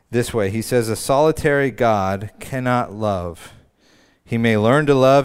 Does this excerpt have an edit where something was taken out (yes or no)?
no